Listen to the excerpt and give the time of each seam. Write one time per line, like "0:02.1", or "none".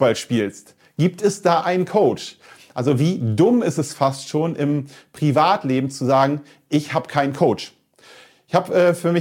none